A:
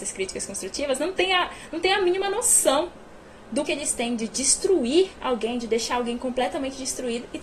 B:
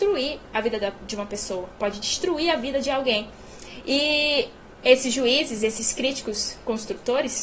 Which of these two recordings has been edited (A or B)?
A